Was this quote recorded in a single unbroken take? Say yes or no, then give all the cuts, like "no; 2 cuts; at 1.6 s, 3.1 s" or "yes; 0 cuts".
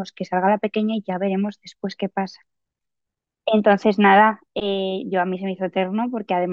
yes; 0 cuts